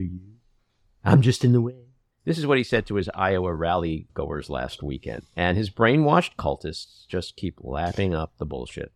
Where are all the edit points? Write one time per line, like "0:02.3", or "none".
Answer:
0:02.1
0:05.3